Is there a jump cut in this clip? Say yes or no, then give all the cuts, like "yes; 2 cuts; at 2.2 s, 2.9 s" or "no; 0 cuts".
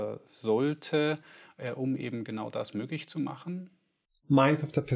no; 0 cuts